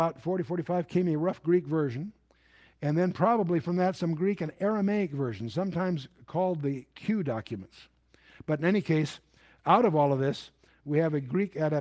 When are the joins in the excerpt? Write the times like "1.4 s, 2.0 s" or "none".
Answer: none

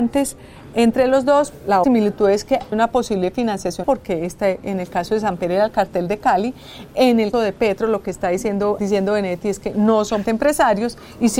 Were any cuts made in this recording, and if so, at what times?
1.8 s, 2.7 s, 3.8 s, 7.3 s, 8.8 s, 10.2 s

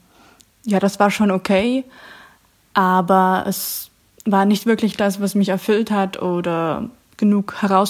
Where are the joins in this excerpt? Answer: none

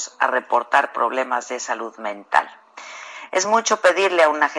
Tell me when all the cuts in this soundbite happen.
none

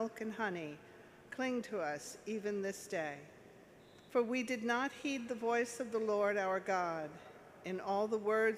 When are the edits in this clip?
4.1 s

